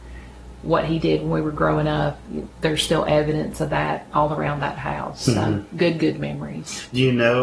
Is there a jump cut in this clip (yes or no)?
no